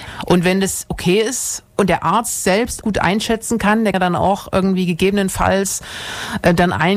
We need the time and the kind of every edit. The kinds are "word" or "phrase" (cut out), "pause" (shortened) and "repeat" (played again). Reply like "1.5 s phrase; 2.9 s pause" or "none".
1.7 s pause; 2.8 s word; 3.9 s word